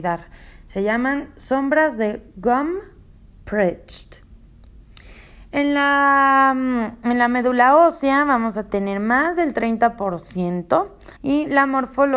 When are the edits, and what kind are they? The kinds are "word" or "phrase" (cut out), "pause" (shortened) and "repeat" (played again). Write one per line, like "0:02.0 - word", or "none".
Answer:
0:11.2 - pause